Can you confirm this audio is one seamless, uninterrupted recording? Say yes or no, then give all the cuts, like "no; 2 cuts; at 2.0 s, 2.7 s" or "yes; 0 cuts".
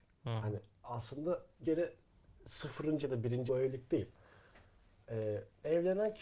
no; 3 cuts; at 1.6 s, 3.0 s, 3.5 s